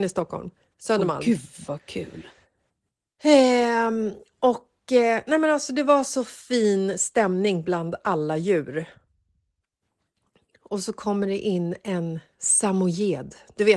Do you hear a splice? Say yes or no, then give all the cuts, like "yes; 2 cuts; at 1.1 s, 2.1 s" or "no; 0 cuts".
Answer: no; 0 cuts